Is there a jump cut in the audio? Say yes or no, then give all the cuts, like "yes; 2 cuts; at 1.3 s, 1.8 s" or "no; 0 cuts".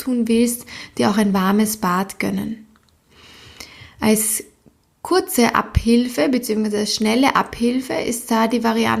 no; 0 cuts